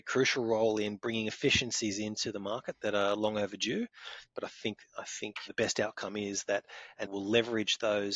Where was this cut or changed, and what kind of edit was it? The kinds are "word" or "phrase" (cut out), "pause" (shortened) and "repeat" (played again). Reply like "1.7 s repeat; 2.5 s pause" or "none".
5.5 s phrase; 7.0 s word